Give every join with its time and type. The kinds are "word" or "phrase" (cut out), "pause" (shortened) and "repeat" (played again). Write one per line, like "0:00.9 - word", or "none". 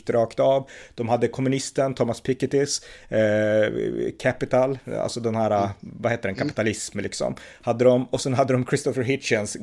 none